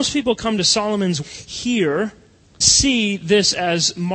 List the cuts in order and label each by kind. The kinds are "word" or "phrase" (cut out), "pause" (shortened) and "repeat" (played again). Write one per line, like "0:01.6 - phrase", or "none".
0:01.2 - word
0:02.6 - word